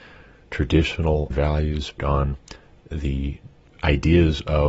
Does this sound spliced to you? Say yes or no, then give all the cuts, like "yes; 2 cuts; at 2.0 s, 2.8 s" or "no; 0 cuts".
yes; 2 cuts; at 1.3 s, 2.0 s